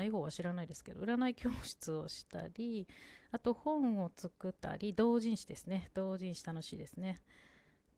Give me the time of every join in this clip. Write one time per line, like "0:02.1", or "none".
0:04.6